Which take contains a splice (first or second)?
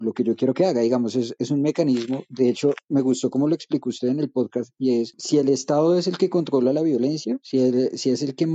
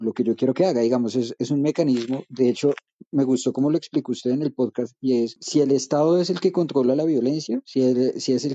first